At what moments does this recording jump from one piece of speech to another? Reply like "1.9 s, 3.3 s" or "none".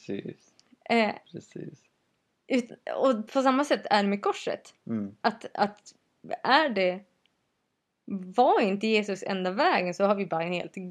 none